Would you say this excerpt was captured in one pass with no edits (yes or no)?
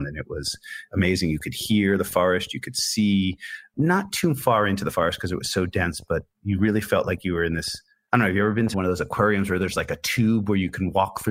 no